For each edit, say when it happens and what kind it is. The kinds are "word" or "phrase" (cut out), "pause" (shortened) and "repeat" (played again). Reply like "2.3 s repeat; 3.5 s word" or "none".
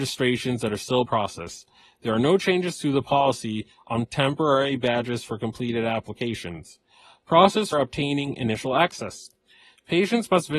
1.1 s word; 4.1 s word; 7.7 s word